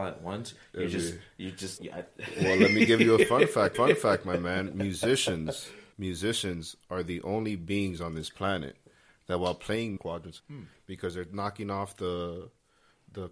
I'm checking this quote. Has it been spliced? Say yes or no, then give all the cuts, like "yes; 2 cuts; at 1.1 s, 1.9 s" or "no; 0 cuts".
yes; 5 cuts; at 1.8 s, 3.7 s, 5.9 s, 10.0 s, 10.4 s